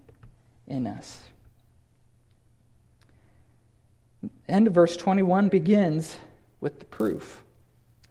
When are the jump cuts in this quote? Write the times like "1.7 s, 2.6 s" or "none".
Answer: 5.5 s